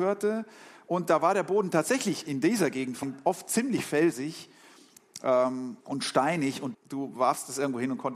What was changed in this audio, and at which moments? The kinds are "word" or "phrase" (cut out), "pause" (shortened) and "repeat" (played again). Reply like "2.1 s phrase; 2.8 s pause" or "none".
3.0 s word; 5.8 s pause; 6.7 s word